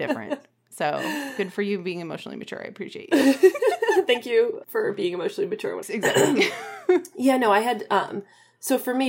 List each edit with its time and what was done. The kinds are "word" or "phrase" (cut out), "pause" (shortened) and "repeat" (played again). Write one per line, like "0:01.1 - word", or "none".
0:04.6 - word
0:05.8 - phrase